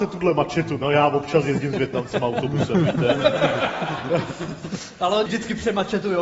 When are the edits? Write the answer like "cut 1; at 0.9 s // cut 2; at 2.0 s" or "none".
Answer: cut 1; at 5.3 s